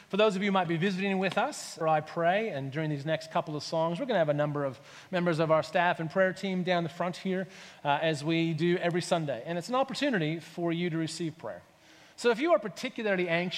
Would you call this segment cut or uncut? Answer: cut